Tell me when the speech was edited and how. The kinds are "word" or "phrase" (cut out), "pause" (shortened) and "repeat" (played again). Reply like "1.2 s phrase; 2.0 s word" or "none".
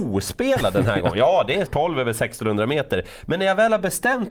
1.7 s word